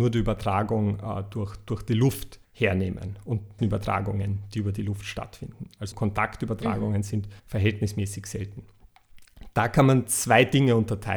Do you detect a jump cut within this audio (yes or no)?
yes